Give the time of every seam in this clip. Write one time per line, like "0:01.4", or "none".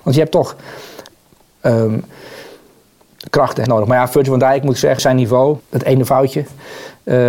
0:03.7
0:05.0
0:05.6